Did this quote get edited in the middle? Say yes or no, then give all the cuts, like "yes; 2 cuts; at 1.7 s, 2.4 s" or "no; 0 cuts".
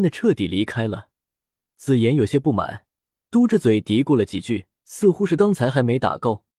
yes; 1 cut; at 4.8 s